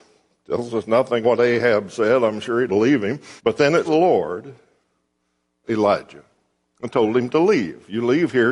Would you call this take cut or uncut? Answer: cut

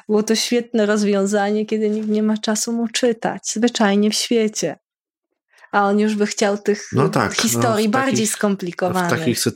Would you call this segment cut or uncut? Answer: uncut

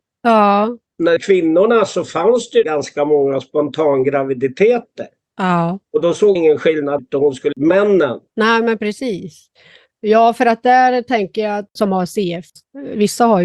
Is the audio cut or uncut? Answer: cut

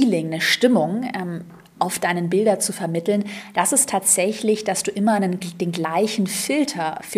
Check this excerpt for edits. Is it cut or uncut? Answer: uncut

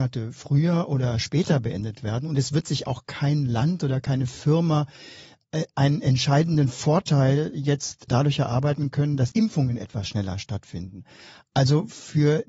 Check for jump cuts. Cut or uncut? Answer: cut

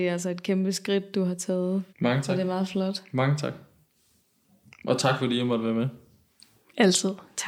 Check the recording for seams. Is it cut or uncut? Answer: cut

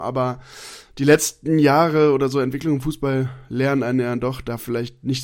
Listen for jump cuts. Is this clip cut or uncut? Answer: uncut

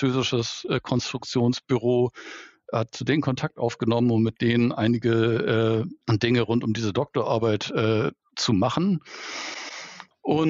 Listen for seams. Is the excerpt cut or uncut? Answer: cut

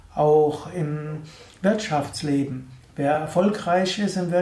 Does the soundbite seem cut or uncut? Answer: uncut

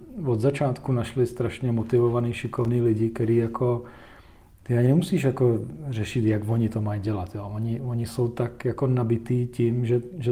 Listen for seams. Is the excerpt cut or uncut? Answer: uncut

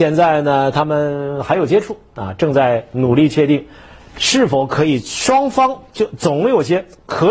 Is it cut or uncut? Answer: uncut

